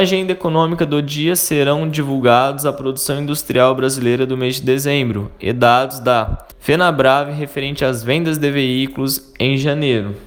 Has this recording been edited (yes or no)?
yes